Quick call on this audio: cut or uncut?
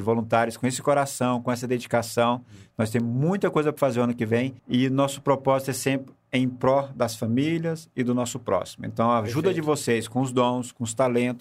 cut